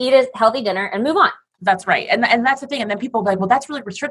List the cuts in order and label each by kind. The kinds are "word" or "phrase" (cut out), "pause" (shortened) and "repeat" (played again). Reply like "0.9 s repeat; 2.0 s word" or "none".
none